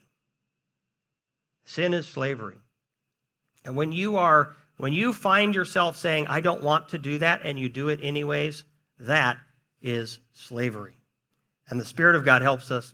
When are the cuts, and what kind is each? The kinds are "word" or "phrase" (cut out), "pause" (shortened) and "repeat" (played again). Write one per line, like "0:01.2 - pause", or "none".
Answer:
none